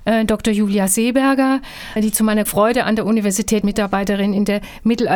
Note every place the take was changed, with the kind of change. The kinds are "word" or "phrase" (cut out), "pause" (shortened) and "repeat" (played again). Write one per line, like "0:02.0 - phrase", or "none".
0:02.0 - word
0:02.5 - word
0:03.6 - word